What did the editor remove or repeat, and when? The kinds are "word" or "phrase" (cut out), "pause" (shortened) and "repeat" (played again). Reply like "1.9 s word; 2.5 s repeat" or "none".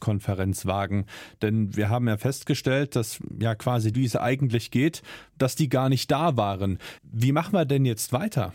3.9 s phrase; 7.0 s pause